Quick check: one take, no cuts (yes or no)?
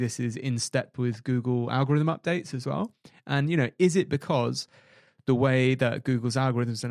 yes